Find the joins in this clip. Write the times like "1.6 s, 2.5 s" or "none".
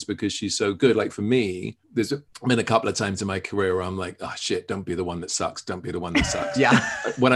1.8 s, 2.3 s